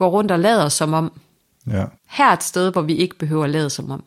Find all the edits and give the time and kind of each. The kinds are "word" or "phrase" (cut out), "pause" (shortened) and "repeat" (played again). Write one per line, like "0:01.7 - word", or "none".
0:02.0 - pause